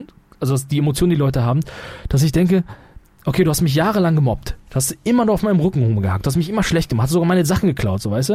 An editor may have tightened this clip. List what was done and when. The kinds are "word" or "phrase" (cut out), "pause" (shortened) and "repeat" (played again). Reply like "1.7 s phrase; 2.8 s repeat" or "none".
none